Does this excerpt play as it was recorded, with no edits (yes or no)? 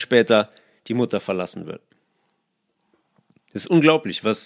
yes